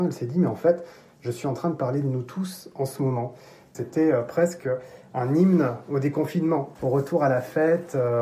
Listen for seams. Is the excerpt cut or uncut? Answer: uncut